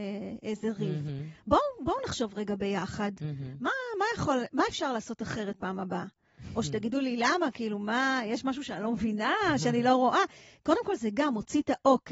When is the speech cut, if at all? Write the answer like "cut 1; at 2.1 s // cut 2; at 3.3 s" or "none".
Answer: none